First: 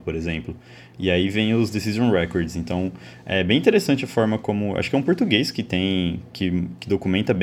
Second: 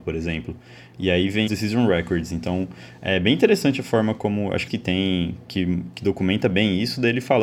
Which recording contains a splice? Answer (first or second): second